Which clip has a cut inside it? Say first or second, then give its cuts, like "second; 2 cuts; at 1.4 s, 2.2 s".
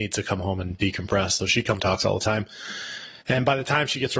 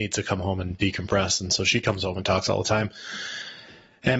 first; 3 cuts; at 1.4 s, 1.8 s, 3.2 s